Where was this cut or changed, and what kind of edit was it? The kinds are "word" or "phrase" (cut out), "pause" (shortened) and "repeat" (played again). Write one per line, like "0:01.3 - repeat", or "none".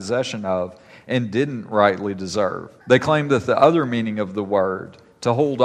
0:02.8 - pause